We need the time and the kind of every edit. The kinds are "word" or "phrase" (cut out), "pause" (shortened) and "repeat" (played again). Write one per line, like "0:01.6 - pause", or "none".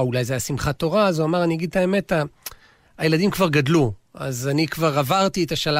none